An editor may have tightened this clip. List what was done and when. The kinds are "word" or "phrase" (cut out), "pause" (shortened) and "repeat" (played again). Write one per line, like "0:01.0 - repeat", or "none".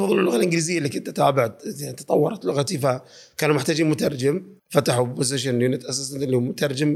0:04.6 - pause